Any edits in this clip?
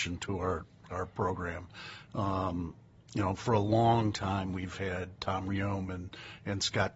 no; 0 cuts

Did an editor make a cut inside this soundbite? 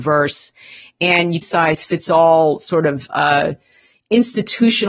yes; 1 cut; at 1.4 s

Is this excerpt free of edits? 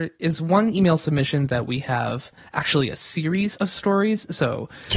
yes; 0 cuts

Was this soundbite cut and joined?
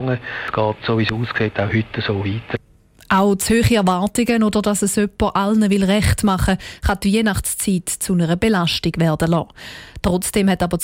no; 0 cuts

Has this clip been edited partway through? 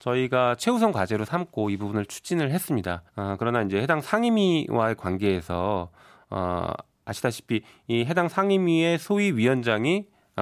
yes; 1 cut; at 3.1 s

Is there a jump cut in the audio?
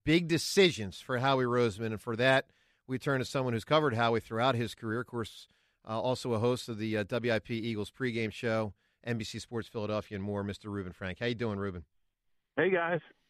no; 0 cuts

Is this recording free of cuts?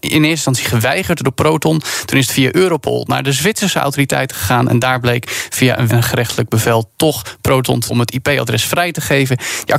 no; 2 cuts; at 5.9 s, 7.9 s

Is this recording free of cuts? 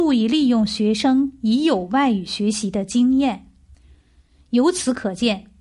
yes; 0 cuts

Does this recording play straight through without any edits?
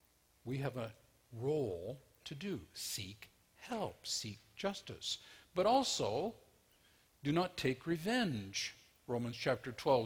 yes; 0 cuts

